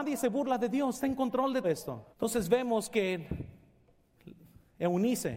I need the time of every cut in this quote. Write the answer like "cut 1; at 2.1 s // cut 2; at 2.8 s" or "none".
cut 1; at 0.9 s // cut 2; at 1.6 s // cut 3; at 2.1 s